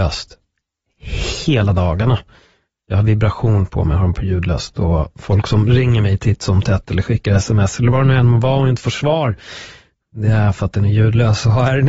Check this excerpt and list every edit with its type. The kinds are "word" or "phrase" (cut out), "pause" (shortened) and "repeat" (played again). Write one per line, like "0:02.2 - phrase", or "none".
none